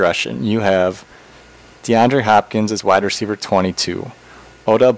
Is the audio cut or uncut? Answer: uncut